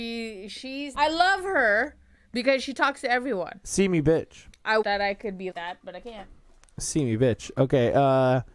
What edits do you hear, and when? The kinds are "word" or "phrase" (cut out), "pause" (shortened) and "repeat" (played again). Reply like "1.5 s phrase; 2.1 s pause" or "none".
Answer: 0.9 s word; 4.8 s word; 5.5 s word